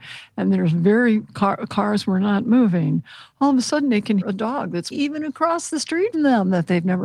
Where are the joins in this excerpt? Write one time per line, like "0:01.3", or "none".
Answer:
0:04.2
0:04.9
0:06.1